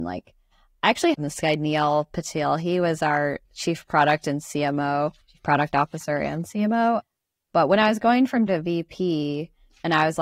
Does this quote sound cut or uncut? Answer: cut